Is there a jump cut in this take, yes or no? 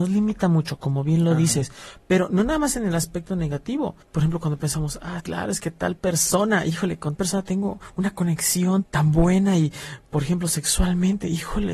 yes